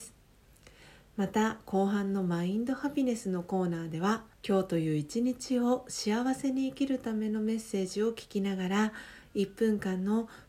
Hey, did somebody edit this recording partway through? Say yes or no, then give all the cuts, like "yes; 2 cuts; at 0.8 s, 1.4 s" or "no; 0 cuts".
yes; 1 cut; at 4.3 s